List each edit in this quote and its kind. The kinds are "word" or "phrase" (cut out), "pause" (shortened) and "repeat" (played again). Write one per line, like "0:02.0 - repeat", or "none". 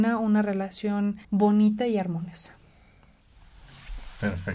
0:01.2 - pause